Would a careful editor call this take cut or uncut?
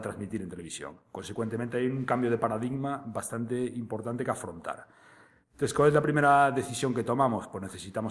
uncut